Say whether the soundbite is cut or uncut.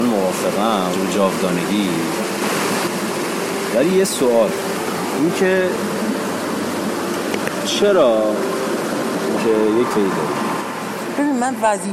cut